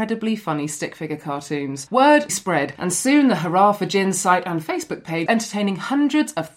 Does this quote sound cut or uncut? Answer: cut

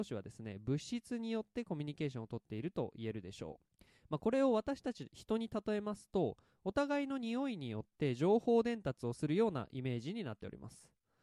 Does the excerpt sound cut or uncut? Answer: cut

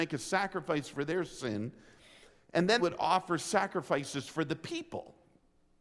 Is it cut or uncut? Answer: cut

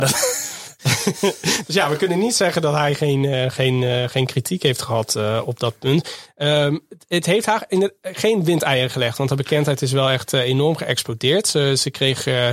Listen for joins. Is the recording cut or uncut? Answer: uncut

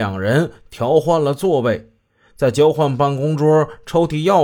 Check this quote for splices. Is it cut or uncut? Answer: uncut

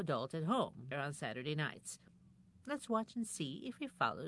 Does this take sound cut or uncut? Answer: cut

